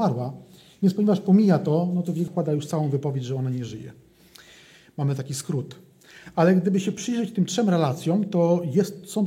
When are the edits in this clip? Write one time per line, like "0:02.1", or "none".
0:02.3